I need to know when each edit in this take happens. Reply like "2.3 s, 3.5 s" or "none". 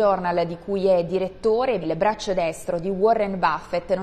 1.8 s